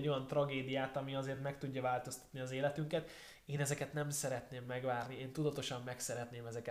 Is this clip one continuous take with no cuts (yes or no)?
yes